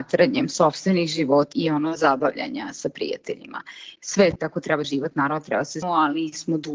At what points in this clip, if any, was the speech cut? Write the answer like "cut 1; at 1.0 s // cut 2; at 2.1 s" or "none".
cut 1; at 1.5 s // cut 2; at 4.4 s // cut 3; at 4.8 s // cut 4; at 5.8 s